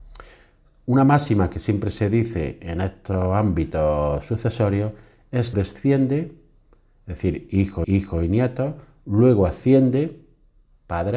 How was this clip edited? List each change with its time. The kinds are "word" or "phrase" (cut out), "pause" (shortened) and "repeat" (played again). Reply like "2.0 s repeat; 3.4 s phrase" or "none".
5.5 s phrase; 7.8 s repeat

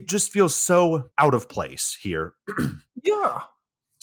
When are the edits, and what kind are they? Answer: 1.1 s pause

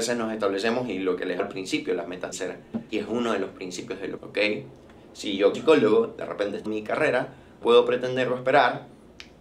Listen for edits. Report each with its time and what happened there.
1.4 s word; 2.3 s word; 2.9 s word; 4.2 s word; 5.5 s word; 6.7 s word; 7.6 s word

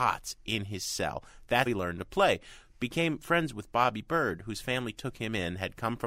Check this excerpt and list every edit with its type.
1.7 s word

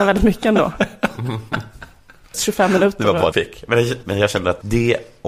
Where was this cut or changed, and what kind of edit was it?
2.3 s phrase; 3.3 s phrase; 4.0 s word

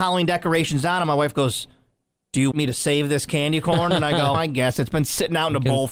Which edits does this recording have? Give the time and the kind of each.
2.5 s word; 4.3 s word

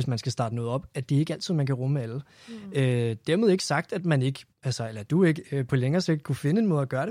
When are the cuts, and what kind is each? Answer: 4.5 s pause

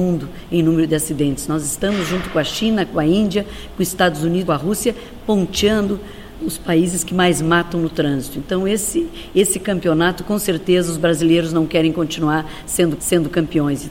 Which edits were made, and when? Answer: 4.5 s phrase; 6.4 s word; 13.0 s repeat

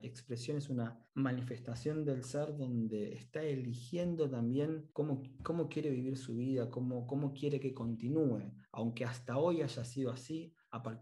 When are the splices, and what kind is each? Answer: 1.1 s pause; 4.9 s pause

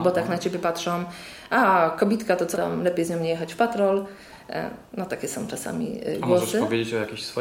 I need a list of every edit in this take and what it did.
2.5 s word

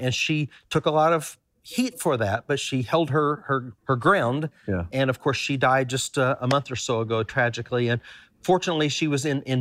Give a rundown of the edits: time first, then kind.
3.8 s pause

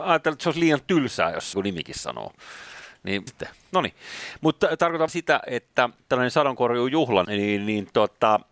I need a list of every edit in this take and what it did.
1.5 s phrase; 3.3 s word; 5.1 s word; 7.2 s word

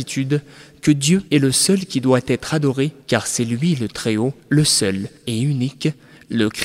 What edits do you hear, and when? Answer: 1.3 s pause; 3.0 s pause; 4.4 s pause; 5.2 s pause

